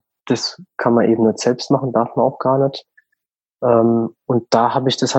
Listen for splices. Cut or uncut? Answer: uncut